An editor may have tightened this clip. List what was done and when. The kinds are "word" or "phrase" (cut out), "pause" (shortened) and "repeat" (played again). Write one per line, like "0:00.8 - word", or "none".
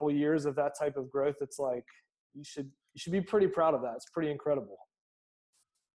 none